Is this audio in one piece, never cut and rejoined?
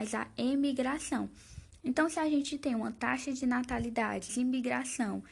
no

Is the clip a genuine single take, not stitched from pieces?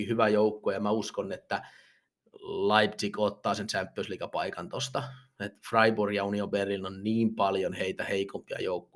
yes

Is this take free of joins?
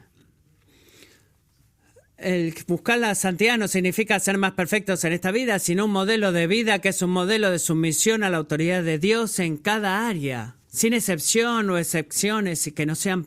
no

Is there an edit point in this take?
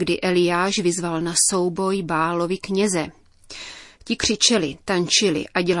no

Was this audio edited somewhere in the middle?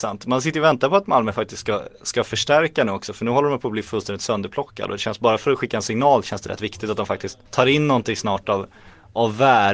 yes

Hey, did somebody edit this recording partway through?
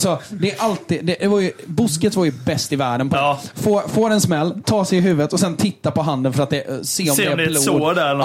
no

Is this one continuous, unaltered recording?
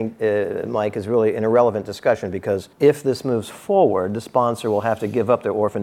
no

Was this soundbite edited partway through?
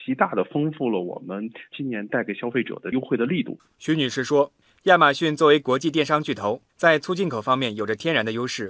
yes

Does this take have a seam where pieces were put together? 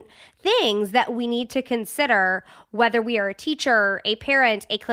no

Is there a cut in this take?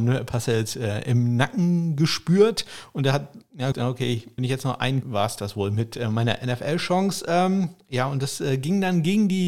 yes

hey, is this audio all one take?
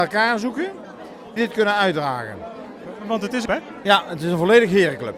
no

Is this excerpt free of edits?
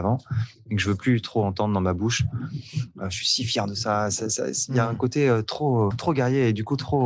no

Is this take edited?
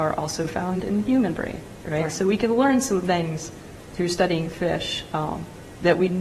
no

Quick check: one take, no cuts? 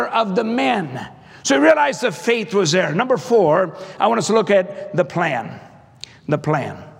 yes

